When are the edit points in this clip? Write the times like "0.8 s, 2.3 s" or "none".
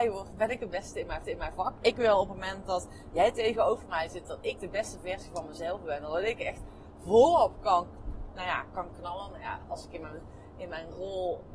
1.2 s